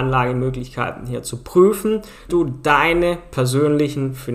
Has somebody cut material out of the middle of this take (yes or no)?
yes